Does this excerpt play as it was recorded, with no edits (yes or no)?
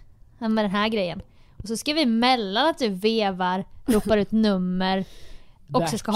yes